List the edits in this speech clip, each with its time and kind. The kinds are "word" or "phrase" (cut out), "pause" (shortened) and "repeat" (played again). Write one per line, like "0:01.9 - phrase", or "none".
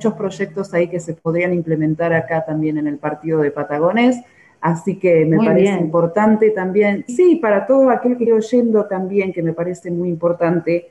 0:07.1 - word
0:08.3 - word